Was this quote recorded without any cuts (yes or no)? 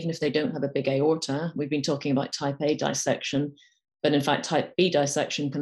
yes